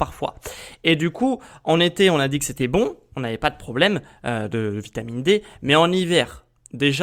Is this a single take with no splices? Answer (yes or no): yes